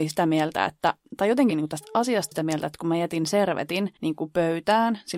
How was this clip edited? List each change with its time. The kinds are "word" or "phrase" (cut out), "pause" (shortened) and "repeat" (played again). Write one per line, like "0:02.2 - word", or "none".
0:01.0 - pause
0:01.5 - phrase
0:02.3 - phrase
0:04.0 - pause